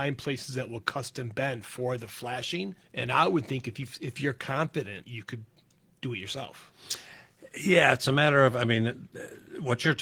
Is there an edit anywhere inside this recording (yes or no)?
yes